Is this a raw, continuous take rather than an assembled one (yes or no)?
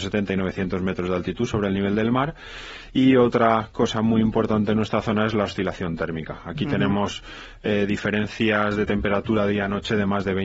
yes